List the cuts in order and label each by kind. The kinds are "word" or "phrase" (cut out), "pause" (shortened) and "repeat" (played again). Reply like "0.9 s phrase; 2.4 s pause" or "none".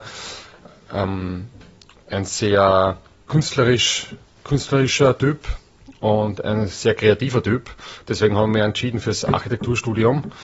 none